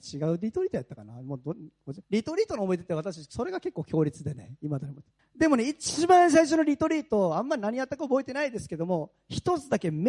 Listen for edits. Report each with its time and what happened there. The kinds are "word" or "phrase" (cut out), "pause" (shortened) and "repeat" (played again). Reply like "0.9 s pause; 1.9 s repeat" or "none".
2.0 s pause; 5.2 s pause